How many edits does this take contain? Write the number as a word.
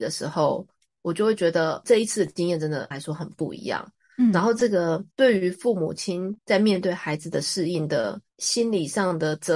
four